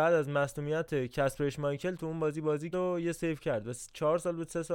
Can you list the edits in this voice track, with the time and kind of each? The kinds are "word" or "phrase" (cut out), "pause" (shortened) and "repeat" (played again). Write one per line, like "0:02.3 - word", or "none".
0:02.7 - word